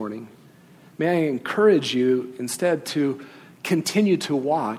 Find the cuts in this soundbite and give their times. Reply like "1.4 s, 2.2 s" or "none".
none